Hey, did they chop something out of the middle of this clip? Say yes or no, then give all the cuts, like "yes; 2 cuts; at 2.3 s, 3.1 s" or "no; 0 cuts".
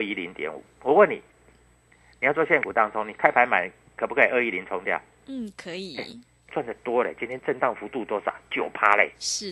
no; 0 cuts